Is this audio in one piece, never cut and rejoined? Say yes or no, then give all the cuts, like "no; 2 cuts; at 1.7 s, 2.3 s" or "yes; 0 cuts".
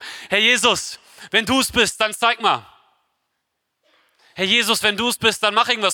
yes; 0 cuts